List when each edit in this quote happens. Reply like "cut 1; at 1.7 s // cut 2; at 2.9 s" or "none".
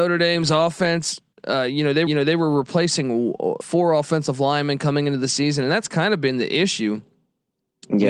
cut 1; at 1.3 s // cut 2; at 2.1 s // cut 3; at 3.6 s

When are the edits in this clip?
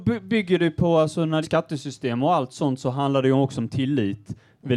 cut 1; at 1.4 s

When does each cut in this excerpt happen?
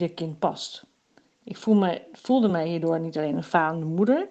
none

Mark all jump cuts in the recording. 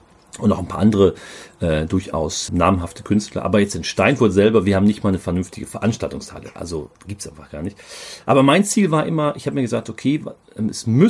cut 1; at 2.5 s // cut 2; at 6.9 s

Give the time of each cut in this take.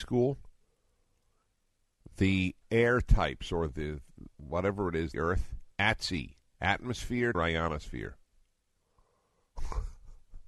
cut 1; at 2.6 s // cut 2; at 3.7 s // cut 3; at 4.3 s // cut 4; at 5.1 s // cut 5; at 5.7 s // cut 6; at 7.3 s

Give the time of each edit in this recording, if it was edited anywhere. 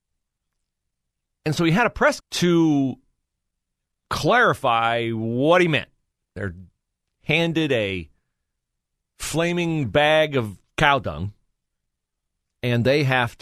cut 1; at 2.2 s

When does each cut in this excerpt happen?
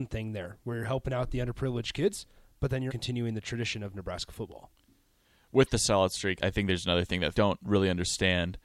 cut 1; at 2.9 s // cut 2; at 6.4 s // cut 3; at 7.3 s

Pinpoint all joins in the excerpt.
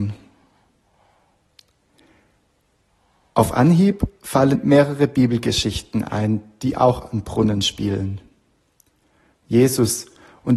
cut 1; at 4.5 s

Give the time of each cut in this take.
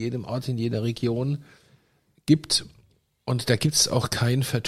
none

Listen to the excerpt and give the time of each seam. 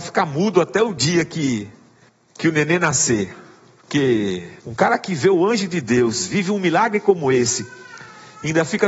cut 1; at 2.1 s // cut 2; at 4.6 s

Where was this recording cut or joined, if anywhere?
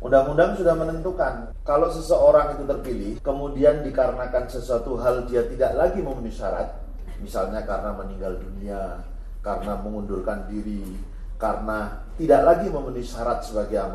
none

